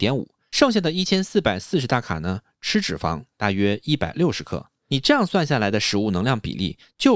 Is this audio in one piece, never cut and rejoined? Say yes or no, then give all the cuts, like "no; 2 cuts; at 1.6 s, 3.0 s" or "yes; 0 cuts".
yes; 0 cuts